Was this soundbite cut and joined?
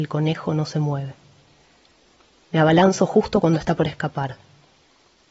no; 0 cuts

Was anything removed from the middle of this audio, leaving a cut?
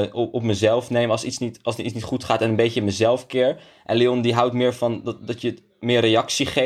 no; 0 cuts

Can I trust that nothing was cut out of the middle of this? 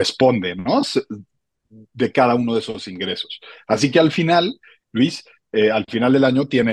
yes; 0 cuts

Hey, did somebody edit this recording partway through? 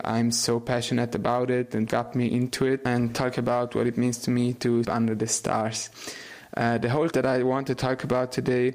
yes; 3 cuts; at 1.9 s, 4.8 s, 7.1 s

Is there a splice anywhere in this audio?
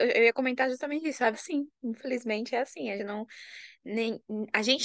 yes; 2 cuts; at 1.3 s, 3.0 s

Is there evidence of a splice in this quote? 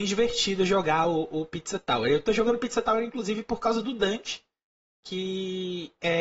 no; 0 cuts

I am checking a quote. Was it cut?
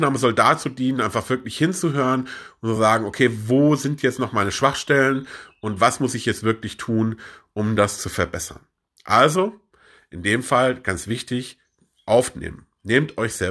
no; 0 cuts

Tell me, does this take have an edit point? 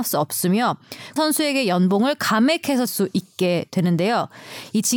yes; 2 cuts; at 1.2 s, 2.9 s

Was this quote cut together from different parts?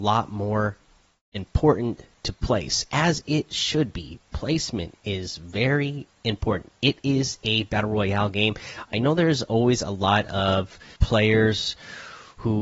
yes; 1 cut; at 11.0 s

